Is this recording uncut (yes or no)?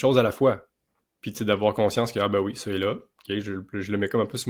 yes